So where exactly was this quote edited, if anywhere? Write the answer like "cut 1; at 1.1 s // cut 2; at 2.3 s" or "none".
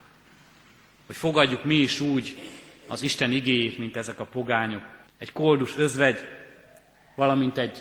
cut 1; at 5.1 s